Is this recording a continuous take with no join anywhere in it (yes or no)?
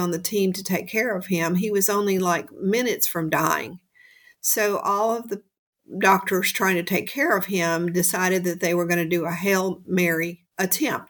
yes